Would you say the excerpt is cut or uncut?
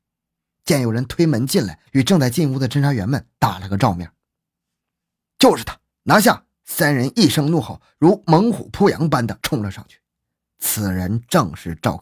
cut